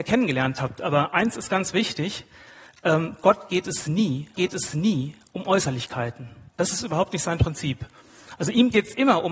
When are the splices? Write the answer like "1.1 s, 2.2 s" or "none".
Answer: 4.3 s, 6.5 s